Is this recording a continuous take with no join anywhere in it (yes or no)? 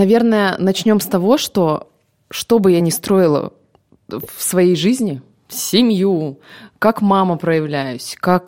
yes